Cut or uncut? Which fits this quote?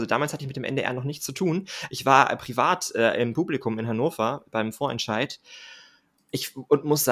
uncut